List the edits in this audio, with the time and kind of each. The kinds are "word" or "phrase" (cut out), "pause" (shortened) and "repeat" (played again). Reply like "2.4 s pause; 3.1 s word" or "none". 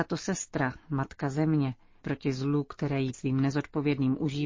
2.0 s word; 3.1 s word

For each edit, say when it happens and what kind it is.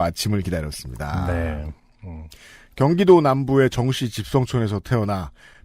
none

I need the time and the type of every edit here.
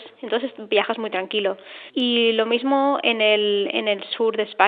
1.9 s pause

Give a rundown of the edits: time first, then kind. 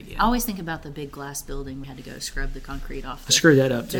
1.8 s word

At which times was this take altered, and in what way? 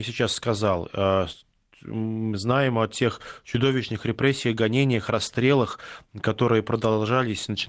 none

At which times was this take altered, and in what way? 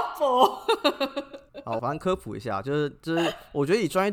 1.8 s phrase

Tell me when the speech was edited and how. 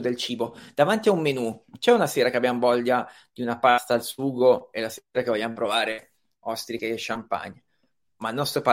none

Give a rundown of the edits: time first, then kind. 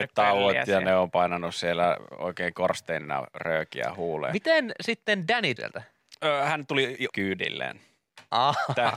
5.6 s phrase; 7.1 s phrase

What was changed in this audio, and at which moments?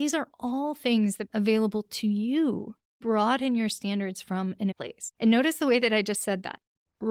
1.3 s word; 3.0 s phrase; 4.7 s word

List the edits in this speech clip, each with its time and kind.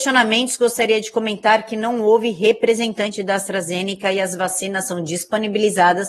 none

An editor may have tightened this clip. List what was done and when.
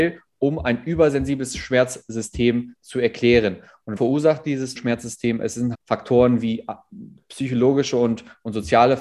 4.0 s word; 4.8 s word; 5.7 s word

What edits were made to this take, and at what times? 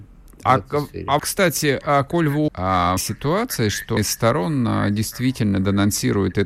1.2 s word; 2.5 s word; 3.0 s phrase; 4.0 s word

